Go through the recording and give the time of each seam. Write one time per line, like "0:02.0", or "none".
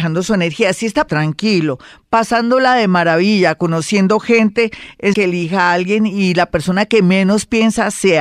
0:01.1
0:05.1